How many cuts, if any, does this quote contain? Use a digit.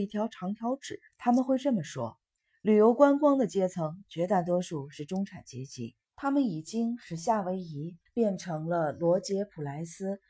4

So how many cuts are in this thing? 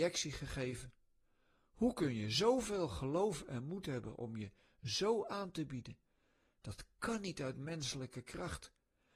0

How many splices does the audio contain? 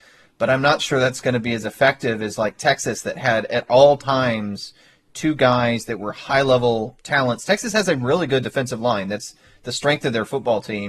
0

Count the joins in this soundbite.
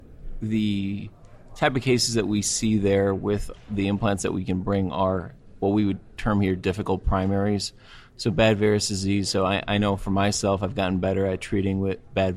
0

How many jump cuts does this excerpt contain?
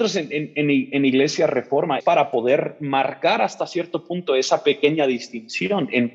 1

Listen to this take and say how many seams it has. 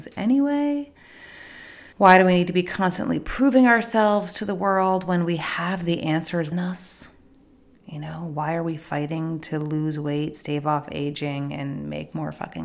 2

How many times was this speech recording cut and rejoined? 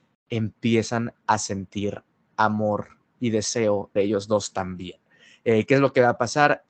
1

